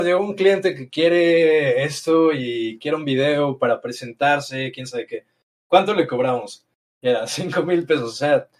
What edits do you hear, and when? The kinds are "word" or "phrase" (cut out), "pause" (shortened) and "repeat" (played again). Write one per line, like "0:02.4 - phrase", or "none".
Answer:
none